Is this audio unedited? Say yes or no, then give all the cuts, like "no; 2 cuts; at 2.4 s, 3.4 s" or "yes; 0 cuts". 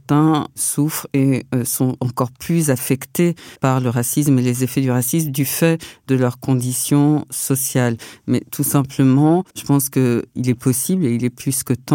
no; 2 cuts; at 3.6 s, 9.5 s